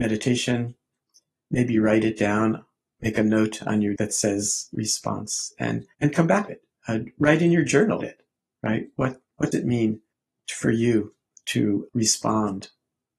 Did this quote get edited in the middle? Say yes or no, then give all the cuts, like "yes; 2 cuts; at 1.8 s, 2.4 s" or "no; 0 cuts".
yes; 8 cuts; at 4.0 s, 4.7 s, 5.9 s, 6.5 s, 8.0 s, 9.5 s, 10.1 s, 11.9 s